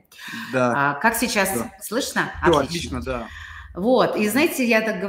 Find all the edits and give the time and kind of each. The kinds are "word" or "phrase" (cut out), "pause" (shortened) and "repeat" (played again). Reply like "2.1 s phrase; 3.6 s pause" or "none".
none